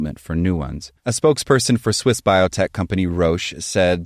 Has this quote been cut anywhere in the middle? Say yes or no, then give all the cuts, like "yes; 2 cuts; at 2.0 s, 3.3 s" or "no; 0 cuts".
yes; 1 cut; at 1.0 s